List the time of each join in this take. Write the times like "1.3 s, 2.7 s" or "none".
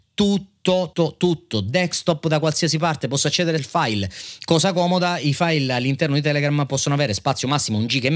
0.9 s, 3.6 s